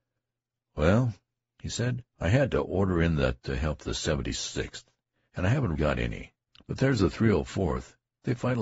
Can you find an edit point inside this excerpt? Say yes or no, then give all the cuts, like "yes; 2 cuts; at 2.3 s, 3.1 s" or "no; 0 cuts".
yes; 4 cuts; at 2.1 s, 3.4 s, 5.7 s, 6.5 s